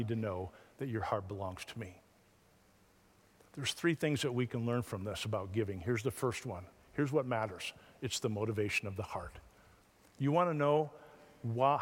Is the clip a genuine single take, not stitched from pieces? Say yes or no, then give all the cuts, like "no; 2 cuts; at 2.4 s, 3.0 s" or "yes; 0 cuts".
yes; 0 cuts